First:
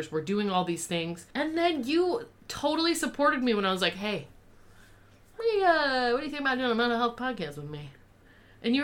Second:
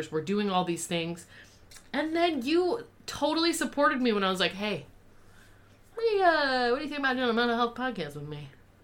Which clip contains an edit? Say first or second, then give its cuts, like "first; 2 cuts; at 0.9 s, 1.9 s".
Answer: first; 1 cut; at 1.3 s